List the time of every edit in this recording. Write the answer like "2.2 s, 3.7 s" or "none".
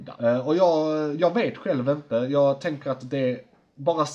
none